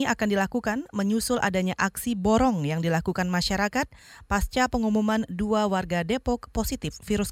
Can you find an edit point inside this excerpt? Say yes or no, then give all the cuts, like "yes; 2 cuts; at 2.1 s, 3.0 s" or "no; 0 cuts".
no; 0 cuts